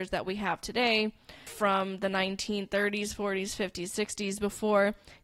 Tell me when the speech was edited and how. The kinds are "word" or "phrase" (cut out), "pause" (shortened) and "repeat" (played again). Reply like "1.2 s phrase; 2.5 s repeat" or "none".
1.5 s word